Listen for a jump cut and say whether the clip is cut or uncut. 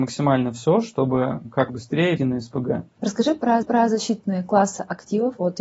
cut